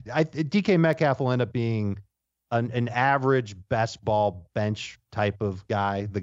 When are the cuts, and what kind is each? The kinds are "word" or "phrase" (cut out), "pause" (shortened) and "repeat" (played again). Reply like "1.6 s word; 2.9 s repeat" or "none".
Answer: none